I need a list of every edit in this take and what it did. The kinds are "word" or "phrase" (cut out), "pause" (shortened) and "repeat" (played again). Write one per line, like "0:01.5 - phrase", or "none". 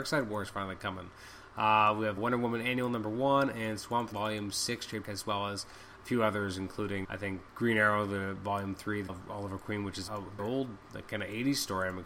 0:02.2 - word
0:04.1 - word
0:05.0 - word
0:07.0 - word
0:07.5 - word
0:09.1 - word
0:10.1 - word
0:10.4 - word